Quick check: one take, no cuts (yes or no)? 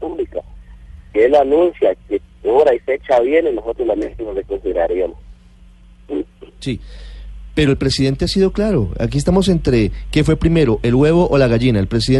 no